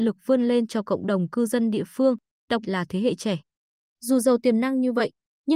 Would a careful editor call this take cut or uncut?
cut